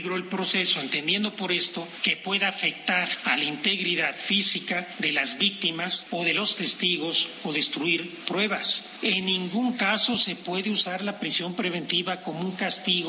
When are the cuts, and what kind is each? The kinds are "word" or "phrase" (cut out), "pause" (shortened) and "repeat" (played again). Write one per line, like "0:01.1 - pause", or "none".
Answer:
none